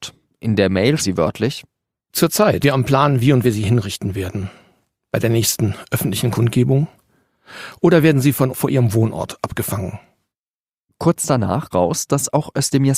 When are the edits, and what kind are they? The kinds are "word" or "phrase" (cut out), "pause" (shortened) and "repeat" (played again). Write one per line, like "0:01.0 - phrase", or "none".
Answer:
0:01.0 - word
0:02.6 - word
0:03.4 - word
0:08.5 - word
0:11.7 - word